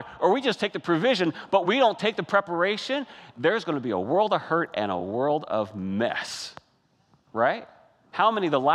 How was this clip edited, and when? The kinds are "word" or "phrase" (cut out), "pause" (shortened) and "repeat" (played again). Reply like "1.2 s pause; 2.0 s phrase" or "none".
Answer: none

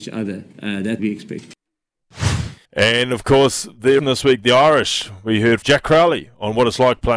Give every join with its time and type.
1.0 s word; 2.6 s pause; 4.0 s word; 5.6 s word

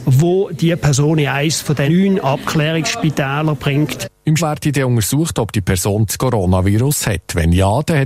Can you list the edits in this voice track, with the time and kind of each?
1.9 s word; 4.4 s word; 6.1 s word

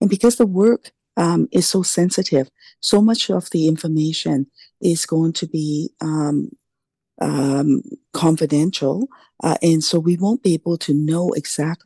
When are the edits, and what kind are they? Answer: none

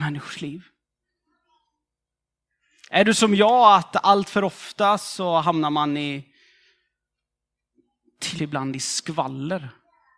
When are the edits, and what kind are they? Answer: 8.4 s phrase

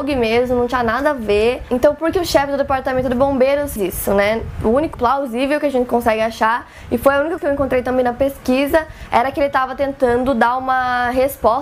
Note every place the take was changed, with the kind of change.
2.1 s word; 3.8 s word; 4.9 s word; 7.4 s word

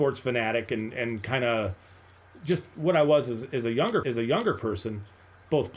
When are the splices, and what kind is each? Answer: 4.0 s repeat

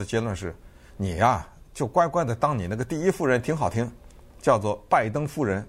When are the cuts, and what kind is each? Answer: none

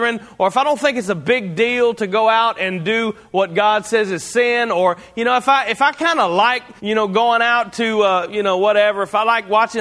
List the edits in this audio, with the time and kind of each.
6.8 s pause

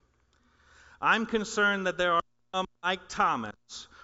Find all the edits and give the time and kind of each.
none

